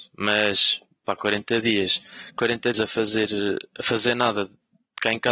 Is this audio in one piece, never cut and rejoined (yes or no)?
no